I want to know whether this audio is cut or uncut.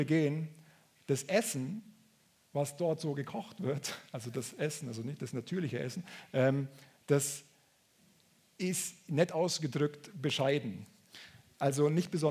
uncut